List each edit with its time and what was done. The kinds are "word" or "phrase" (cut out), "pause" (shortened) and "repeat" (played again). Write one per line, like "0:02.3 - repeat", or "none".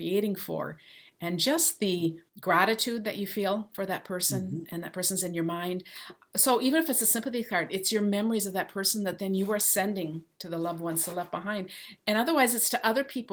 0:02.3 - pause